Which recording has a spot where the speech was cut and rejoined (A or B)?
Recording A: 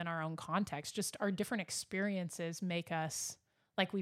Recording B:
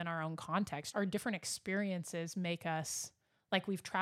B